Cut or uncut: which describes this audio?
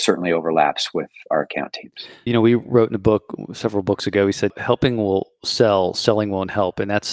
cut